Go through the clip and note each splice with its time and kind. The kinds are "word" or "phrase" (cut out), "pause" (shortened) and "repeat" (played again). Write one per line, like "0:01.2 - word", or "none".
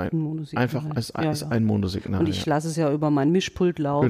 none